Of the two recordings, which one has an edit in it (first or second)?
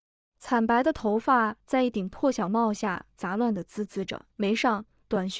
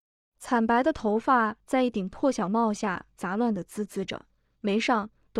first